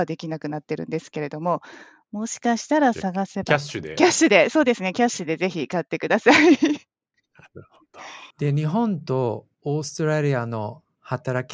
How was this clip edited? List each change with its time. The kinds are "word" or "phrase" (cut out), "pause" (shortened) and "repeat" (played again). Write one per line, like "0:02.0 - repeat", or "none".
0:08.3 - pause